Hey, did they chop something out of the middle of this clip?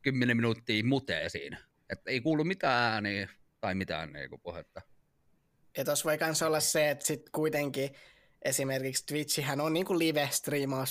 no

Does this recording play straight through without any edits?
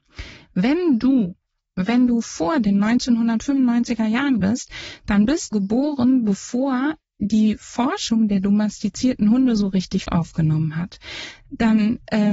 no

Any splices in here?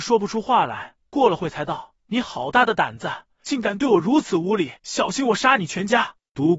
yes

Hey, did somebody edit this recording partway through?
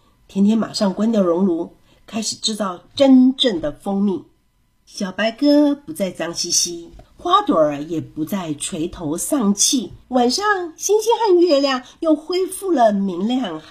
yes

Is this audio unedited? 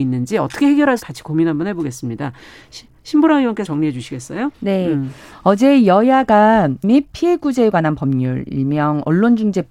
no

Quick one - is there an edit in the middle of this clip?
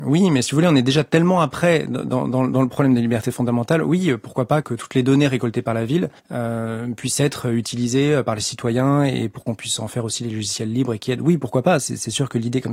yes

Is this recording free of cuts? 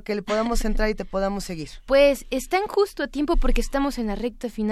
yes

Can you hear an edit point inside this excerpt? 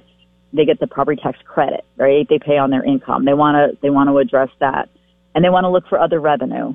no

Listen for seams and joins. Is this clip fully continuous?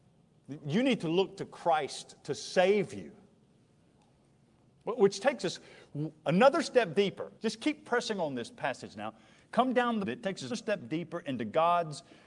no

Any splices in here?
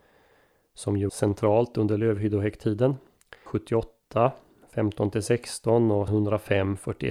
yes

